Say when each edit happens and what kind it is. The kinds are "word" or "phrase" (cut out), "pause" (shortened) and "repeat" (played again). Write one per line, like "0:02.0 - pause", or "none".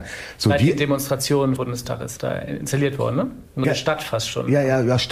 0:01.6 - word
0:02.2 - word
0:03.6 - word